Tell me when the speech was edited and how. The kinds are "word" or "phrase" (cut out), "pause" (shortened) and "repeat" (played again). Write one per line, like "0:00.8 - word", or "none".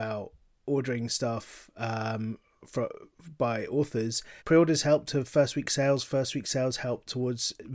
0:02.6 - word
0:04.4 - pause